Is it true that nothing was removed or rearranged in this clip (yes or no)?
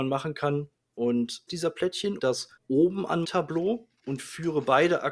no